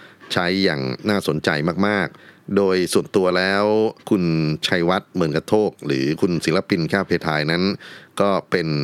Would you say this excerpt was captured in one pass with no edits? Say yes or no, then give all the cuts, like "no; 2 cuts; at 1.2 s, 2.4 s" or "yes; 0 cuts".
no; 2 cuts; at 2.2 s, 4.0 s